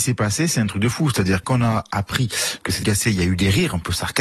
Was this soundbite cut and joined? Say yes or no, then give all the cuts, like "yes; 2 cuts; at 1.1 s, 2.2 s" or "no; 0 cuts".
yes; 2 cuts; at 1.4 s, 2.8 s